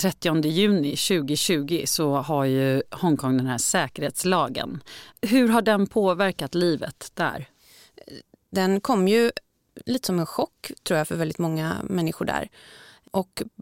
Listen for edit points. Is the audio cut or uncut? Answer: uncut